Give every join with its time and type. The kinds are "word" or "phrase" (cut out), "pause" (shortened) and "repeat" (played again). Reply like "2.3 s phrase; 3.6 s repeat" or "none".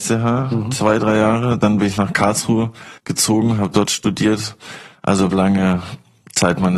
3.0 s pause; 3.8 s word; 5.3 s word